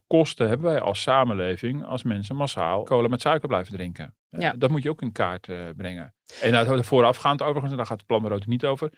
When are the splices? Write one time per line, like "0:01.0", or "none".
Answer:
none